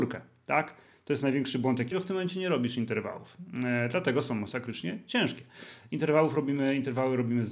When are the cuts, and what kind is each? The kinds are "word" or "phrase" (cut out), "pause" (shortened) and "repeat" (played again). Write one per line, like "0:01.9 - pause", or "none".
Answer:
0:01.9 - phrase